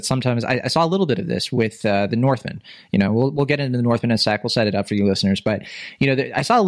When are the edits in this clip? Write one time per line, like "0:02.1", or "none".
none